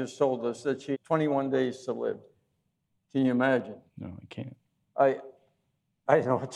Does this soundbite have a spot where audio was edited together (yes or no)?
yes